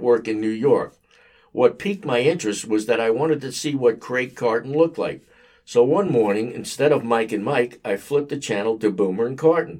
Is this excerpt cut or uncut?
uncut